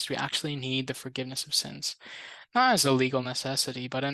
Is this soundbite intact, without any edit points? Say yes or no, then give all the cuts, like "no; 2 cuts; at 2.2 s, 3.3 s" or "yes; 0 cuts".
yes; 0 cuts